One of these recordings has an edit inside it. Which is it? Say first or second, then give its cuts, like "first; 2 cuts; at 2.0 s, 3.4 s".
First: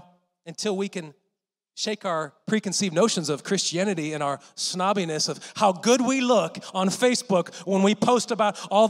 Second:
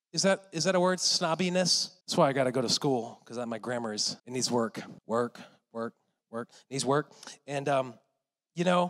second; 3 cuts; at 2.0 s, 4.2 s, 5.0 s